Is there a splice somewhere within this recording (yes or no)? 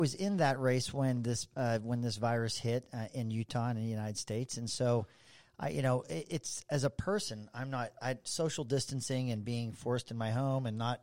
no